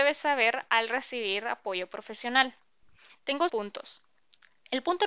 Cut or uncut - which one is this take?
cut